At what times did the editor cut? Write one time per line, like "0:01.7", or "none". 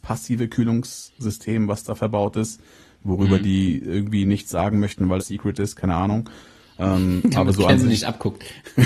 0:05.2